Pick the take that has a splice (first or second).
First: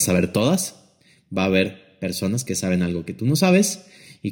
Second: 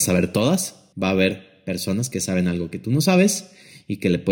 second